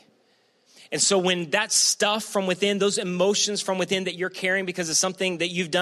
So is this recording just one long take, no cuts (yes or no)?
yes